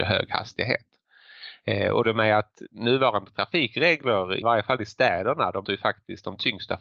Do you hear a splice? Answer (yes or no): yes